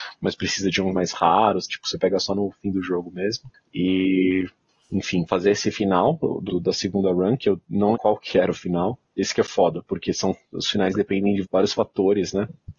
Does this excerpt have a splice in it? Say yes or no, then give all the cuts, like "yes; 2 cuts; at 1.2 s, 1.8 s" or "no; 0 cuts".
yes; 6 cuts; at 0.9 s, 1.7 s, 5.3 s, 6.5 s, 7.9 s, 11.4 s